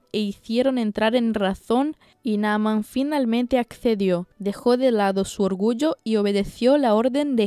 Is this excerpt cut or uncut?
cut